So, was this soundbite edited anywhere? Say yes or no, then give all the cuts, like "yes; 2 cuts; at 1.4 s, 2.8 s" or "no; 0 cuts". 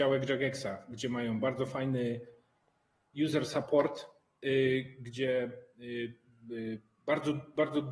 no; 0 cuts